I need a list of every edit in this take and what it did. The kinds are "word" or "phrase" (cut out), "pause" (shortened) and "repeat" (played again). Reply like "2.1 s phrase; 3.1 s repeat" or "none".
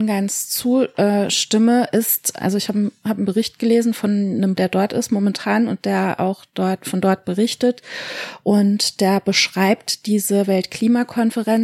2.4 s word; 4.6 s word